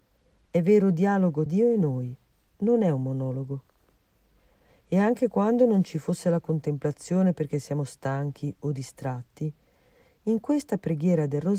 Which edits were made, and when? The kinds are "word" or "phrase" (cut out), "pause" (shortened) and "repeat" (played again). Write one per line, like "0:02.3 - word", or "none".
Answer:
0:01.5 - word

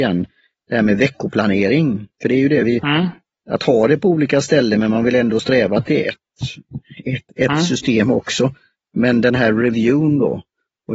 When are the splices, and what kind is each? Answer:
none

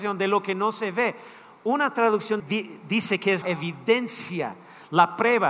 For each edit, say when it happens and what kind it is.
0:02.4 - phrase
0:03.4 - word

